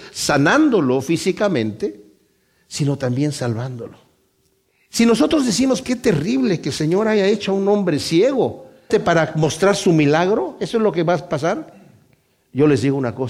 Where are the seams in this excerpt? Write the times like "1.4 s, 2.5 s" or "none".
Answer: 5.8 s, 8.9 s